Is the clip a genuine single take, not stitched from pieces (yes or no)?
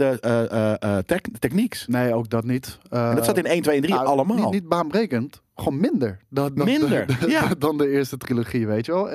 yes